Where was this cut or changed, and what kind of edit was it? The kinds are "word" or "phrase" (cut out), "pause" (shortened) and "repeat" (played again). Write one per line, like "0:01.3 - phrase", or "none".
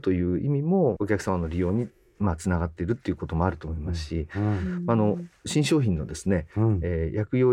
0:01.0 - word